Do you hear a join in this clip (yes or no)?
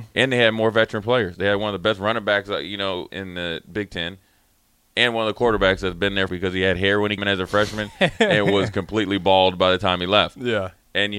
yes